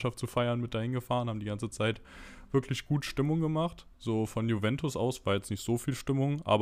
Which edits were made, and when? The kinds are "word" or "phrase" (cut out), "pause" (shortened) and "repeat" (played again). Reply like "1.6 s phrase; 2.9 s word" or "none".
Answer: 3.9 s pause